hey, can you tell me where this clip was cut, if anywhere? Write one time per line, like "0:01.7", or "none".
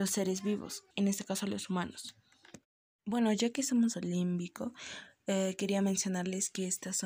0:00.9
0:03.9